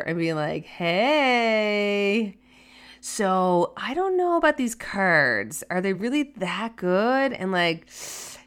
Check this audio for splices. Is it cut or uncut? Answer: uncut